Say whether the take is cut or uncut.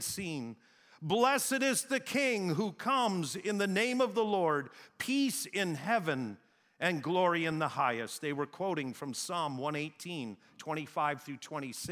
uncut